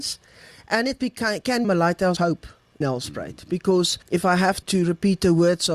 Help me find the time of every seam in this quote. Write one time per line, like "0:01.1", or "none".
0:01.6
0:02.2
0:02.8
0:04.0
0:04.6